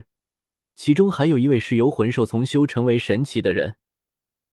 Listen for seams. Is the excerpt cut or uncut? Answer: uncut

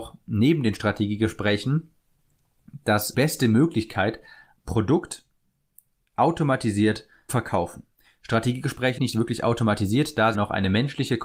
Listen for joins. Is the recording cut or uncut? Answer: cut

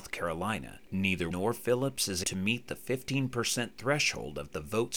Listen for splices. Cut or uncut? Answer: cut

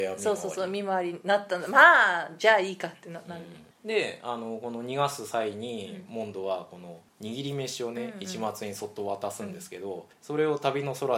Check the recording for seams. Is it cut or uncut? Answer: uncut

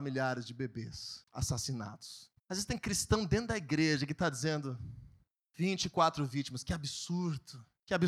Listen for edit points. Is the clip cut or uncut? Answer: cut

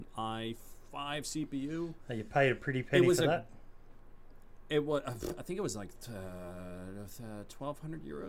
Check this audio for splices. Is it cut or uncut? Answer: uncut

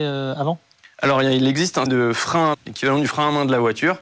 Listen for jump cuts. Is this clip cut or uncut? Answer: cut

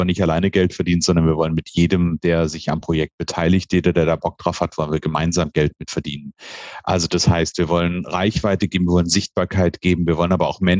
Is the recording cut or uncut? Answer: uncut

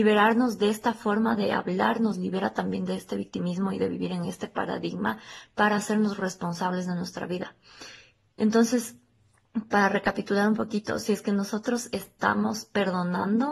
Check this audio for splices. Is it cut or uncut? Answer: uncut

